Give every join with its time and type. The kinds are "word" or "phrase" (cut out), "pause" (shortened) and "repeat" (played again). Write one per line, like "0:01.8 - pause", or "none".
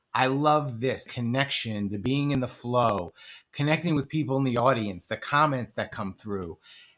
none